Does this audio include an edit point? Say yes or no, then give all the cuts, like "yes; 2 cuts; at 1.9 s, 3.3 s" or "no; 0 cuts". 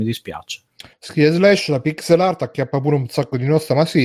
no; 0 cuts